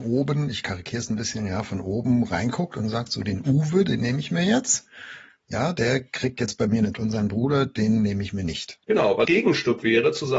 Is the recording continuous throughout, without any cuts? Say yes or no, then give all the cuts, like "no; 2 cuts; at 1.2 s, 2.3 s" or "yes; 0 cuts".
no; 3 cuts; at 6.9 s, 8.8 s, 9.3 s